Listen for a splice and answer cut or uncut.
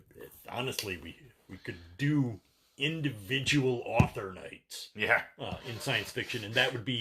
uncut